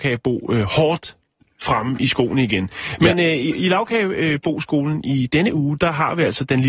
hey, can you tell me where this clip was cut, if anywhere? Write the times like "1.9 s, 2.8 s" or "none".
none